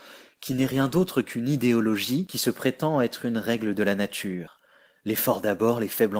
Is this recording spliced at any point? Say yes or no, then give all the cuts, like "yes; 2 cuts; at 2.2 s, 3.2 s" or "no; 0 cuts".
no; 0 cuts